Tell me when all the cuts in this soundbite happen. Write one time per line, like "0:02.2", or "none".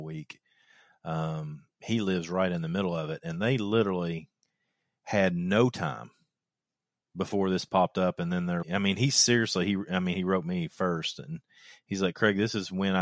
0:08.6